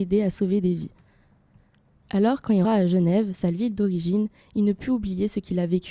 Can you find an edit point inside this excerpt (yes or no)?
yes